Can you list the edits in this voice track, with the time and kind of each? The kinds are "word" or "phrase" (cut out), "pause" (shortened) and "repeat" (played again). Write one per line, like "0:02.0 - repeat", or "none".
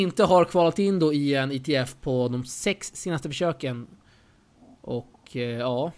none